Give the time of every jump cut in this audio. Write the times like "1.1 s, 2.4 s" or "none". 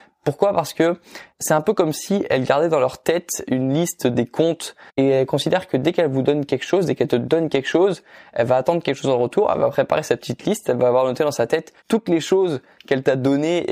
1.3 s, 11.8 s